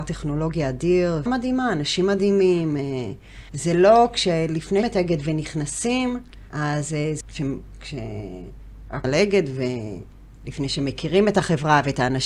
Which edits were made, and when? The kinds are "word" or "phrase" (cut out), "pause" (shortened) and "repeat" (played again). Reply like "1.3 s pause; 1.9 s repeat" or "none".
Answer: 1.3 s word; 3.5 s pause; 4.8 s word; 6.5 s pause; 7.2 s phrase; 9.0 s word